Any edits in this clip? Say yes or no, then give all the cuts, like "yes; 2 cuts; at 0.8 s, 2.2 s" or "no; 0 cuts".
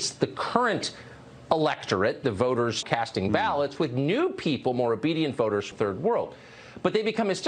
yes; 2 cuts; at 2.8 s, 5.7 s